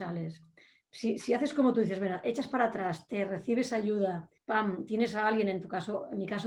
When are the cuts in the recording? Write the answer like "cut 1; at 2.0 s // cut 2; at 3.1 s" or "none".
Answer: cut 1; at 4.4 s